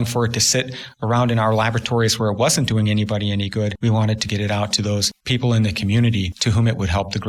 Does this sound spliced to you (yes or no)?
no